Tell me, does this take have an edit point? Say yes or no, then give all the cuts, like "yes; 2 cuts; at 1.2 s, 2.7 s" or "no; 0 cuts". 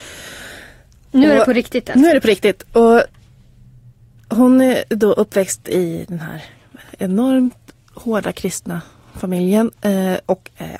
no; 0 cuts